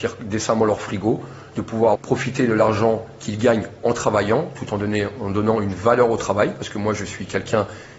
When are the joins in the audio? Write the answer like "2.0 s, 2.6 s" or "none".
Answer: 1.9 s